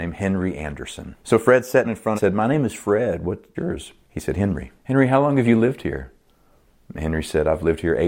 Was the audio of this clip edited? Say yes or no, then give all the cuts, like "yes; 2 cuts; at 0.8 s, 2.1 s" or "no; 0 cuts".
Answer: yes; 6 cuts; at 1.2 s, 1.8 s, 2.2 s, 3.5 s, 4.0 s, 4.8 s